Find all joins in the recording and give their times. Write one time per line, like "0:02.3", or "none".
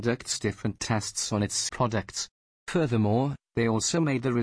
0:01.7